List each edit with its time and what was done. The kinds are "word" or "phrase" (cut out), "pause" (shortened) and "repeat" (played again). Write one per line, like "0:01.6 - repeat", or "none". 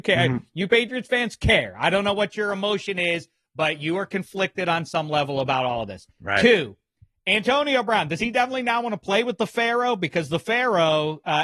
0:06.1 - pause